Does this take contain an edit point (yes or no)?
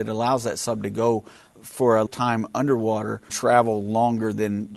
yes